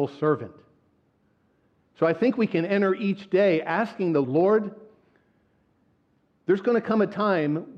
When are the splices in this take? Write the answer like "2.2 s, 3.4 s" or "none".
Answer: 4.2 s